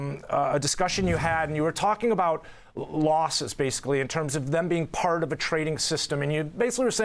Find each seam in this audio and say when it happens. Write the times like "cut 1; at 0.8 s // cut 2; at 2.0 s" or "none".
none